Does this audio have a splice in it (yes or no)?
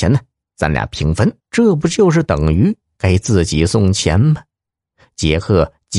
yes